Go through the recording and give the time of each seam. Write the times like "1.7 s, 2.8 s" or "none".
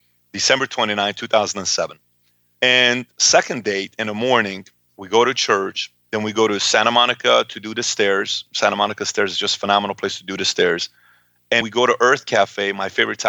11.6 s